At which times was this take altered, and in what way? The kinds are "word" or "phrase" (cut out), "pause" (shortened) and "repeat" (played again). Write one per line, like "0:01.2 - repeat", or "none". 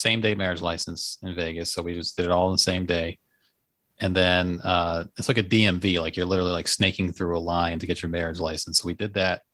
none